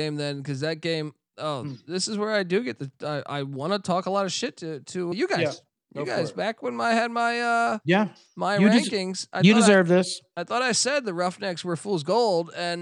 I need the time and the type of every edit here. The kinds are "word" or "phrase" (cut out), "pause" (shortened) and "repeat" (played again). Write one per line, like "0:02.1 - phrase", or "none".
0:05.1 - word
0:07.8 - pause